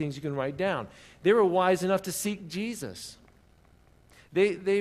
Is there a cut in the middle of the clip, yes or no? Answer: no